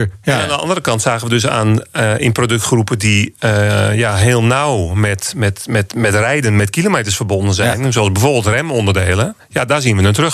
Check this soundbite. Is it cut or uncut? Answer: uncut